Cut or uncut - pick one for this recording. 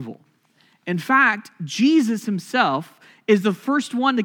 uncut